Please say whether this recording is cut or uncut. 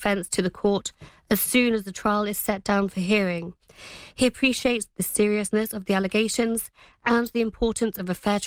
uncut